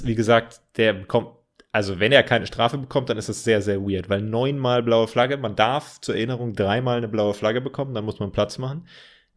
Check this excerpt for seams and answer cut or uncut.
uncut